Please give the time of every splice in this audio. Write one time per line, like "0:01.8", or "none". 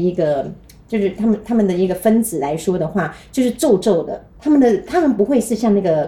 0:04.3